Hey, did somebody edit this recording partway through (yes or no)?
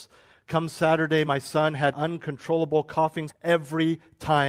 yes